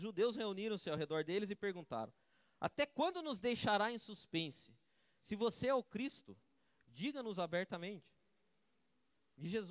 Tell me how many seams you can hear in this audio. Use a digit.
0